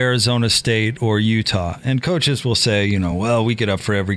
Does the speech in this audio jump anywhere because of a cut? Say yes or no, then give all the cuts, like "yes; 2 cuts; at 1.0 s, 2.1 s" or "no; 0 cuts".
no; 0 cuts